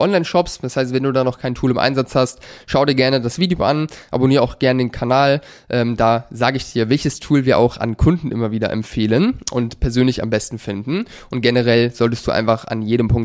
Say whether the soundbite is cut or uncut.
uncut